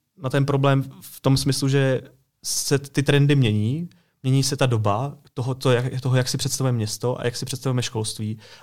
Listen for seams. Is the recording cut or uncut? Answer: uncut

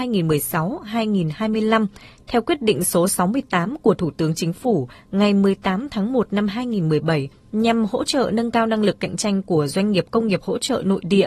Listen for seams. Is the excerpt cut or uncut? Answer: uncut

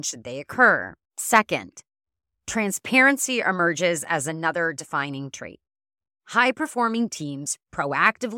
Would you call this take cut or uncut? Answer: cut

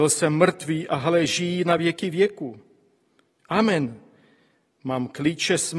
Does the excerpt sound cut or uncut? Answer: uncut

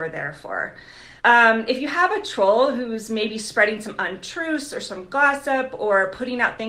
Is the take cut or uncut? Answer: cut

